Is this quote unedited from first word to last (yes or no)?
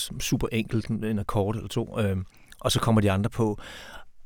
yes